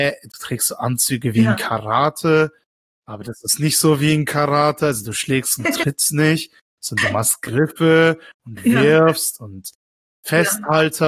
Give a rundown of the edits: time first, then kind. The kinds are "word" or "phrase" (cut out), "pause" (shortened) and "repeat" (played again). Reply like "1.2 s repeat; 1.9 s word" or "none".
none